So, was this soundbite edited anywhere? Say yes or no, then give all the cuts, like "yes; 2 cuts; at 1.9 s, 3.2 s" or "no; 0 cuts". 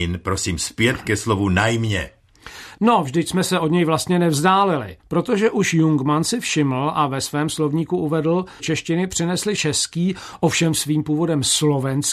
yes; 3 cuts; at 5.0 s, 8.6 s, 9.6 s